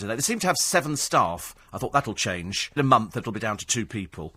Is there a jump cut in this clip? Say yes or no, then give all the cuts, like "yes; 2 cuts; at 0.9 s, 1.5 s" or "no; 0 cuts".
yes; 2 cuts; at 1.6 s, 2.8 s